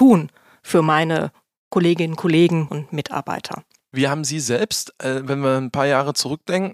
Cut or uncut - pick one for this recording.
cut